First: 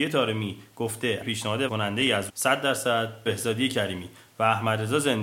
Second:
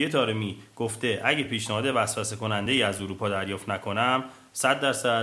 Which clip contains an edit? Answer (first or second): first